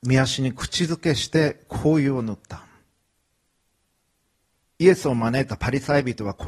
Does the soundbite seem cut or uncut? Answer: uncut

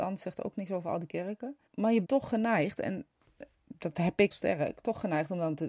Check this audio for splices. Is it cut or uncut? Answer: cut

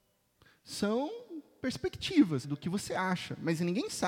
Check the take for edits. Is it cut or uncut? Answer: cut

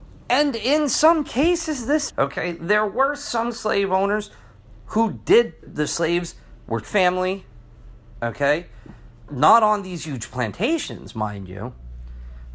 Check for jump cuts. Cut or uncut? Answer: cut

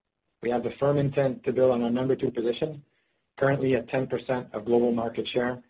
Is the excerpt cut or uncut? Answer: uncut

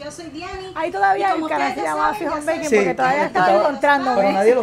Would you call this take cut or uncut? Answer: uncut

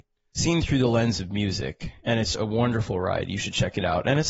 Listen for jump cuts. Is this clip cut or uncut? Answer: cut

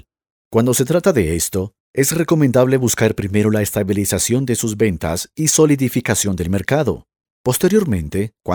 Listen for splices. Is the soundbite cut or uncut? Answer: uncut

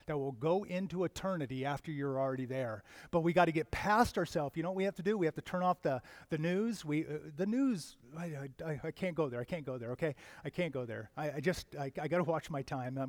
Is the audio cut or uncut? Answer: uncut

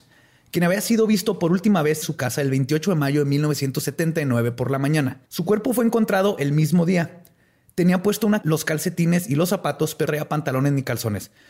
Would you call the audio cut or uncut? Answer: cut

